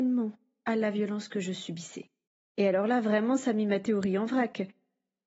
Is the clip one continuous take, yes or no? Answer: no